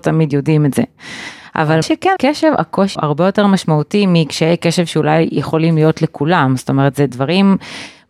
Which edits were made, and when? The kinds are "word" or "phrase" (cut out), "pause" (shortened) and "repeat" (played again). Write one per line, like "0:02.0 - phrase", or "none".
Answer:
0:01.8 - word
0:02.2 - word
0:02.9 - word